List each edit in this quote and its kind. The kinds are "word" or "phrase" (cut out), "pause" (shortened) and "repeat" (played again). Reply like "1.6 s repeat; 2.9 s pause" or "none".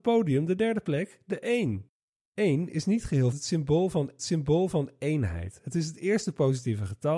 3.3 s word; 4.2 s repeat